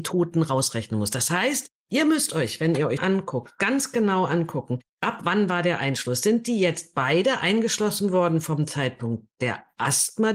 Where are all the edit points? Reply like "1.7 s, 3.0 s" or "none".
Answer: 3.0 s